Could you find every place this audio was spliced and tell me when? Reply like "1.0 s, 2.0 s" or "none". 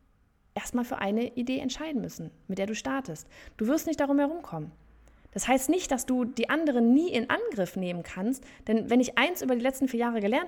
none